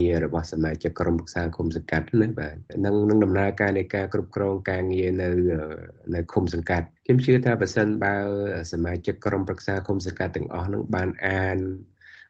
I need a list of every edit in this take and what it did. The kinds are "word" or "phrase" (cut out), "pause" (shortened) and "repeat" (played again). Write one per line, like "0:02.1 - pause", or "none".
0:07.0 - pause